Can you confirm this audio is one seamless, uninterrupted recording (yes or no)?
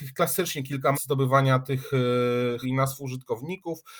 no